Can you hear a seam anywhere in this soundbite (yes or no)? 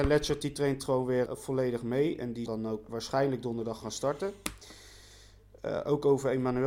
yes